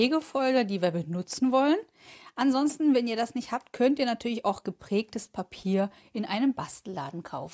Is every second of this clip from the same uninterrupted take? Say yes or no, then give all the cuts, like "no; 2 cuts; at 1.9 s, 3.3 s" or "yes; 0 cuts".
yes; 0 cuts